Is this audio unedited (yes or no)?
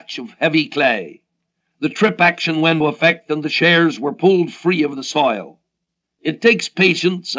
no